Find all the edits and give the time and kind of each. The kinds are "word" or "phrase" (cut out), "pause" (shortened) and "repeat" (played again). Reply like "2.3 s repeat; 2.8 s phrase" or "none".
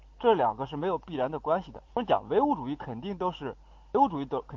1.9 s pause